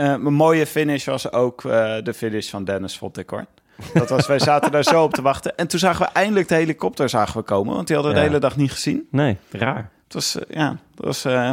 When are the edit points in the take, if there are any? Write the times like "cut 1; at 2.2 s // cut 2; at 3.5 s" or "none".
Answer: none